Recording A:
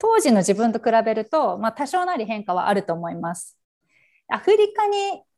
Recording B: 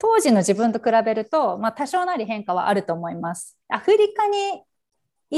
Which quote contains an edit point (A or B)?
B